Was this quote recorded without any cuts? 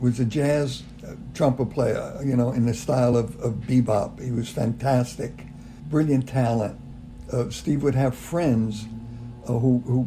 yes; 0 cuts

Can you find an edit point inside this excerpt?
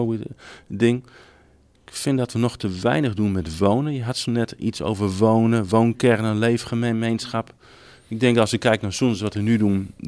no; 0 cuts

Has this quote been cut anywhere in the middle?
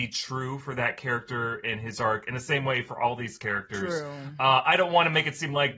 no; 0 cuts

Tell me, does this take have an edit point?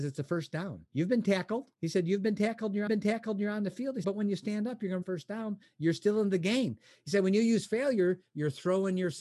yes; 4 cuts; at 1.7 s, 2.9 s, 4.0 s, 5.0 s

